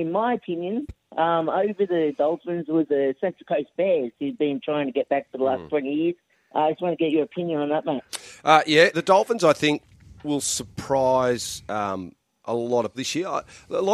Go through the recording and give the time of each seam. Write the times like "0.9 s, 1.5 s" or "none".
2.9 s, 6.3 s, 8.9 s, 10.2 s, 12.9 s